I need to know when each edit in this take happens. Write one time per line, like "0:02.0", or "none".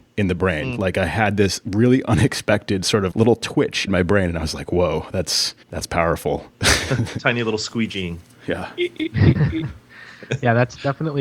0:03.1
0:03.9
0:05.6

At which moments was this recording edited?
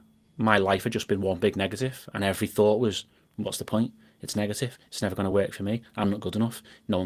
none

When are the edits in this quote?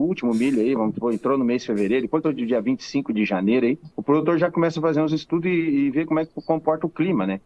0:02.2
0:03.9

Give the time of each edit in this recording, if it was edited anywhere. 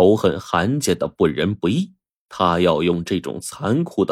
0:02.1

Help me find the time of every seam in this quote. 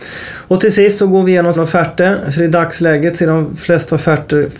0:01.6

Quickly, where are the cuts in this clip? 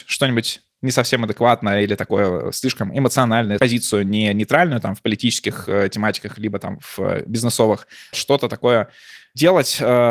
0:03.6
0:08.1

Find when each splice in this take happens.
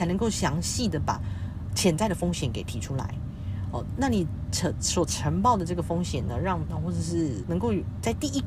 0:06.7
0:07.4

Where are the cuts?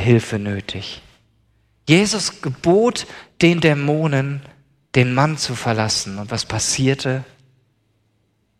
none

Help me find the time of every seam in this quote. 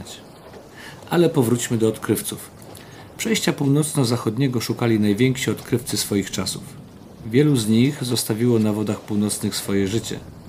none

